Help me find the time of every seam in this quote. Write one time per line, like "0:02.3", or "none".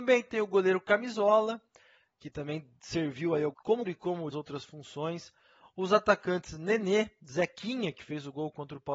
0:03.5
0:03.8
0:04.3